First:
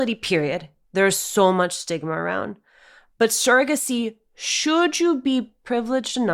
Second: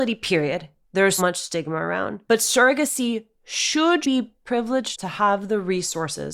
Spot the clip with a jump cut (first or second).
second